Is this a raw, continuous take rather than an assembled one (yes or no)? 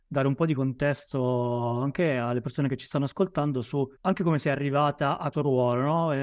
no